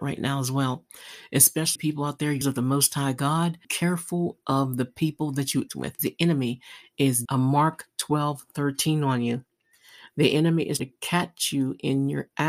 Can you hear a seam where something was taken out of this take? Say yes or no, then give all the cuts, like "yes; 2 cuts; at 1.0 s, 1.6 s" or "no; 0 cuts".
yes; 7 cuts; at 1.8 s, 2.4 s, 3.6 s, 5.7 s, 6.0 s, 7.3 s, 10.8 s